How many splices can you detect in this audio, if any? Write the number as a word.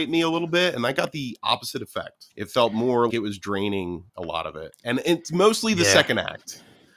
three